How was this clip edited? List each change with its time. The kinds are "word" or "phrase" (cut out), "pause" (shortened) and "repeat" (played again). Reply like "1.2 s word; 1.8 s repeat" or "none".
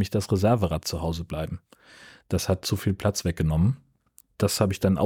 none